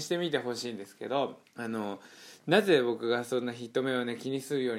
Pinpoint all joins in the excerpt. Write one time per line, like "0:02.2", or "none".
0:01.5